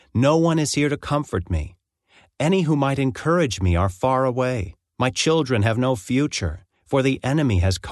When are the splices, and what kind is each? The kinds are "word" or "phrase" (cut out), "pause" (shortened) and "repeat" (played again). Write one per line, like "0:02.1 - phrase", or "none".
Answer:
0:04.9 - pause